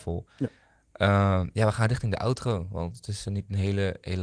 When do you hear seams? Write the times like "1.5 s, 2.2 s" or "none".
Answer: none